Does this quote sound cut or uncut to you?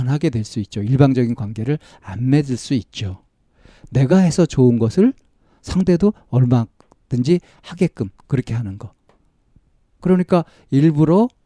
uncut